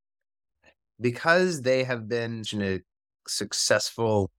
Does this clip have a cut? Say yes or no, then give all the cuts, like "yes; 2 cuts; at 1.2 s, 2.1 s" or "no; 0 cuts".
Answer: yes; 1 cut; at 2.5 s